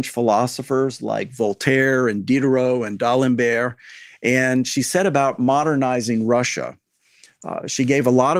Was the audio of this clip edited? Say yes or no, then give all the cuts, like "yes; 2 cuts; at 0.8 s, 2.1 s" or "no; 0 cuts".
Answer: no; 0 cuts